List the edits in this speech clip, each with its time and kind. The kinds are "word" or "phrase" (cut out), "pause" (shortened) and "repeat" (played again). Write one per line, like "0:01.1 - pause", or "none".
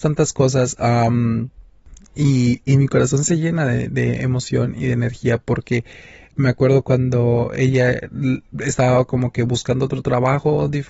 none